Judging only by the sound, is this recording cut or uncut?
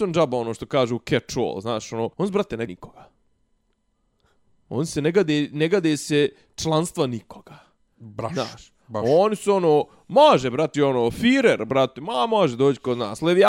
cut